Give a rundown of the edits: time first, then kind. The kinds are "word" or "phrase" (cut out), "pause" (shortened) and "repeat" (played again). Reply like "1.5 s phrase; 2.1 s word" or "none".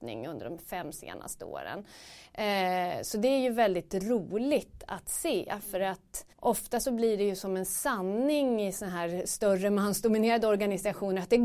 6.3 s pause